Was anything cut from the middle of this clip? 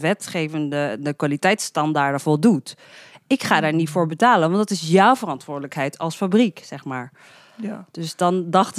no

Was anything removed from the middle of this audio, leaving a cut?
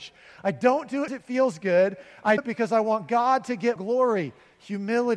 yes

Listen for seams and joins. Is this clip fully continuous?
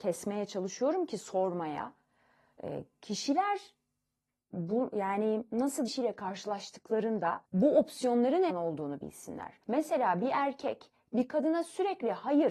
no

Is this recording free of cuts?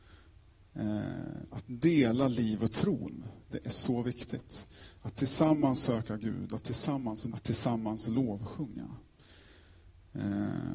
no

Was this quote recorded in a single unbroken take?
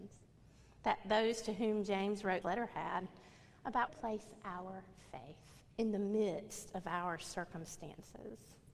no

